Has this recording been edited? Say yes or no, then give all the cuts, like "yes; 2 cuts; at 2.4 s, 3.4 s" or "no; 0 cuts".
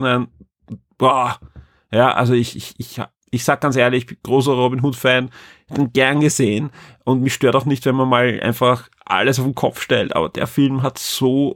no; 0 cuts